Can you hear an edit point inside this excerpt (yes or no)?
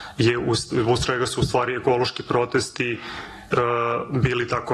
no